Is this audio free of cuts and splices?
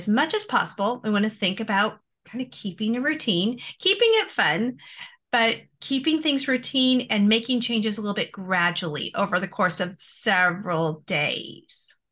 yes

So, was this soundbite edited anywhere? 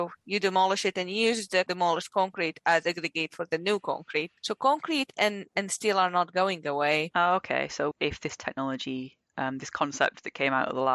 yes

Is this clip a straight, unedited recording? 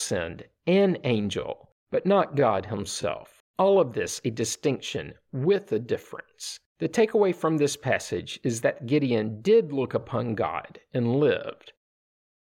no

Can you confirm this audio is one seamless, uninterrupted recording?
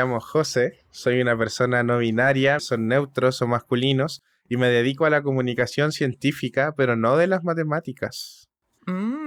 no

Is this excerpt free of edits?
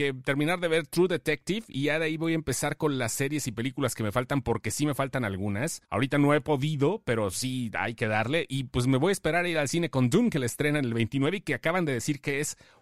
no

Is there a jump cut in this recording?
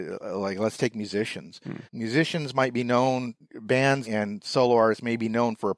yes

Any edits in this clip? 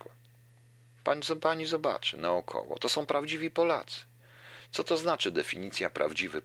no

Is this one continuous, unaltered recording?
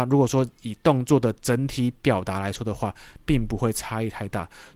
yes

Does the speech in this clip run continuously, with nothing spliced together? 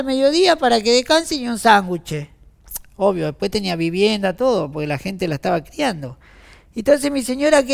yes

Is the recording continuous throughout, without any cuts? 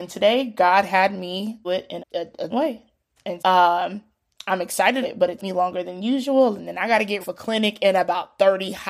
no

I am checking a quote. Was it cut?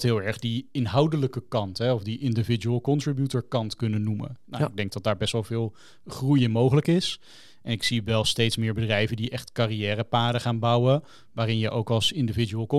no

